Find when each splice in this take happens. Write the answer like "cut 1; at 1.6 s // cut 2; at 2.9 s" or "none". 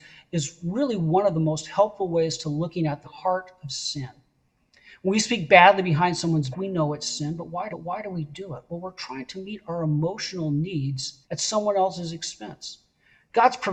cut 1; at 3.0 s // cut 2; at 6.5 s // cut 3; at 7.7 s // cut 4; at 11.2 s